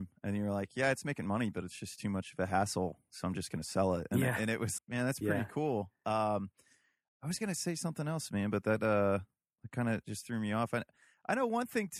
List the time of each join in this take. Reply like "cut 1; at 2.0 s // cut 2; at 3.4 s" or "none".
cut 1; at 4.8 s